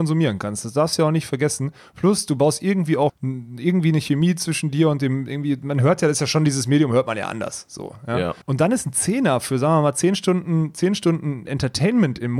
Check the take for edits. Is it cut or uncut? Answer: cut